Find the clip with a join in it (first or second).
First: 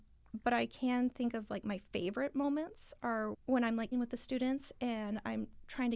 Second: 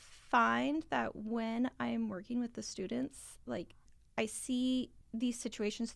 first